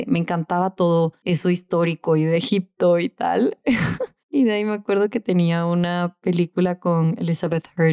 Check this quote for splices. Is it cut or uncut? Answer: uncut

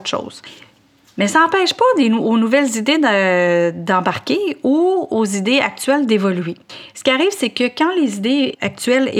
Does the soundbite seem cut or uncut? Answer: uncut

